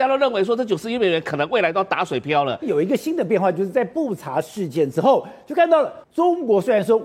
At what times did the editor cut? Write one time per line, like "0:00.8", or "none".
0:06.0